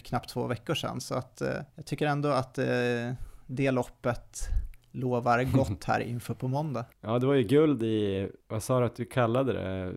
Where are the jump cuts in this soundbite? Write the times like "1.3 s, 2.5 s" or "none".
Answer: 1.7 s, 6.9 s